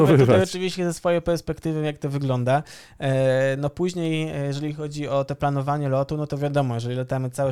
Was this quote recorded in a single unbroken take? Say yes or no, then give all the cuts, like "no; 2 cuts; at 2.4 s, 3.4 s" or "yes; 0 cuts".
yes; 0 cuts